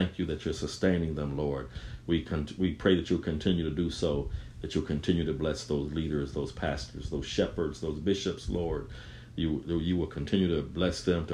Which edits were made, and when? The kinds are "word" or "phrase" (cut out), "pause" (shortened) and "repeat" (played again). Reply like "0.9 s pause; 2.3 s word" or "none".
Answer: none